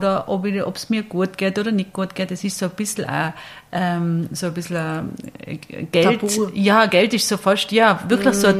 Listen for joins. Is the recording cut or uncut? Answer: uncut